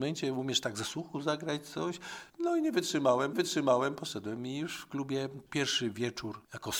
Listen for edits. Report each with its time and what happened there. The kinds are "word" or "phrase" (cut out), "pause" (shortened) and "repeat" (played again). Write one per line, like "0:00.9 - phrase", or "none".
0:02.3 - pause
0:03.3 - repeat